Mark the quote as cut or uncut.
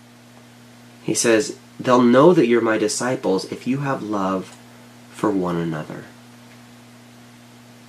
uncut